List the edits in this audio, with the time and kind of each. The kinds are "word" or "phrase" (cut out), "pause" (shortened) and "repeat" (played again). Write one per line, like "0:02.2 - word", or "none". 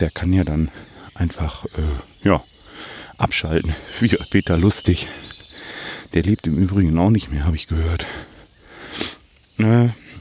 none